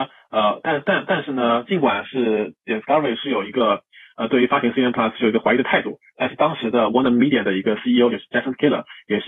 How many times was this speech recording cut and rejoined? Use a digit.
0